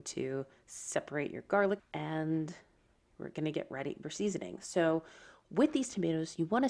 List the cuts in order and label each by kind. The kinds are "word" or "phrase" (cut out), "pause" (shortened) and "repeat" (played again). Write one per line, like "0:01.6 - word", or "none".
0:01.8 - word
0:04.0 - phrase